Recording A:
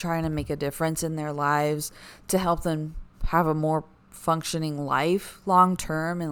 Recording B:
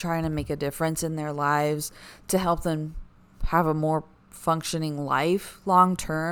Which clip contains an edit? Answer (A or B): A